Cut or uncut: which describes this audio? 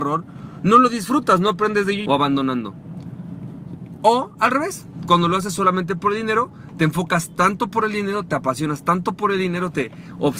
cut